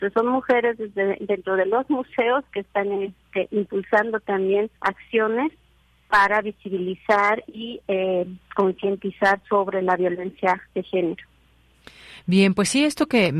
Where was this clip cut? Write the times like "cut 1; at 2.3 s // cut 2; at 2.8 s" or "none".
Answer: cut 1; at 4.8 s